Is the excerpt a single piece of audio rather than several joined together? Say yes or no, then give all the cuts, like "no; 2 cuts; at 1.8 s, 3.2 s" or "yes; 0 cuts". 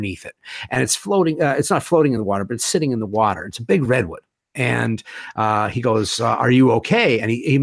yes; 0 cuts